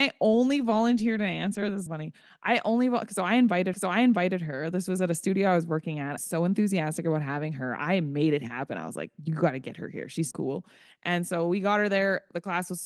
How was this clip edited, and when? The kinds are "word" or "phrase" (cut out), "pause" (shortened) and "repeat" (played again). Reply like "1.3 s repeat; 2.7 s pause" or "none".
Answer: 1.9 s phrase; 3.7 s repeat; 6.2 s phrase; 10.3 s word